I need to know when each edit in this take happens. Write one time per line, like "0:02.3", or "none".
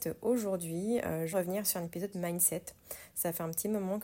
0:01.3
0:02.1